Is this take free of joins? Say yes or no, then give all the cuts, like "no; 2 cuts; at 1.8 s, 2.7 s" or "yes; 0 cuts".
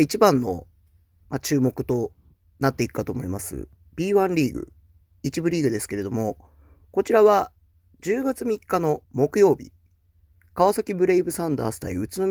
no; 1 cut; at 9.0 s